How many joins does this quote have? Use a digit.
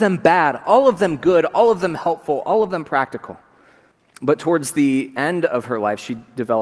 1